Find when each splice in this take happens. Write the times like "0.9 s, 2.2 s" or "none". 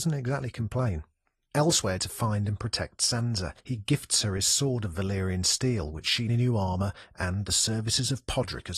2.0 s, 3.6 s, 6.3 s